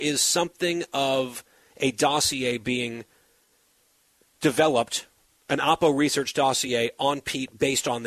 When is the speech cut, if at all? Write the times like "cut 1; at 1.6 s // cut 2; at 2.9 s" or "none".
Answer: none